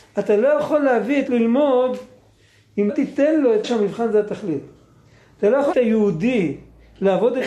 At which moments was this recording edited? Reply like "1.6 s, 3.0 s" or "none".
1.3 s, 2.9 s, 3.6 s, 5.7 s